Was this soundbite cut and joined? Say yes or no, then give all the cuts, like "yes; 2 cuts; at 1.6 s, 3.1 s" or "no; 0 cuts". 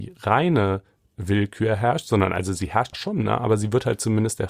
yes; 1 cut; at 2.9 s